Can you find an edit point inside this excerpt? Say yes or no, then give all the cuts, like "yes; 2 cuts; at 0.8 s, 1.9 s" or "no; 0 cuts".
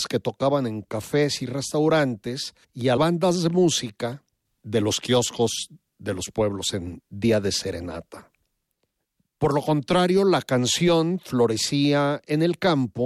yes; 2 cuts; at 2.6 s, 3.0 s